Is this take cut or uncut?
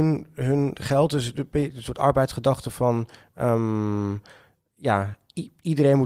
uncut